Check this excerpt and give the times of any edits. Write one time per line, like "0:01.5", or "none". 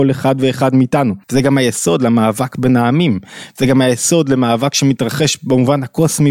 0:01.2